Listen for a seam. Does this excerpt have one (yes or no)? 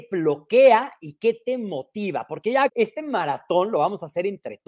yes